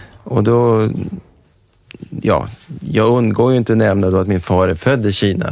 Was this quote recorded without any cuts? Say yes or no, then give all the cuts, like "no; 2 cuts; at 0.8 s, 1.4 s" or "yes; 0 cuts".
yes; 0 cuts